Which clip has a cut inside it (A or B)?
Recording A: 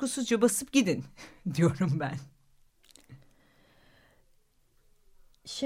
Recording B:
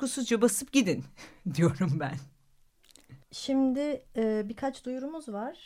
B